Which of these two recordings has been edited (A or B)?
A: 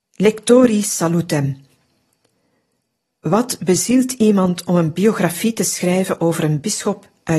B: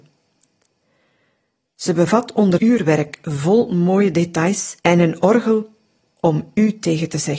B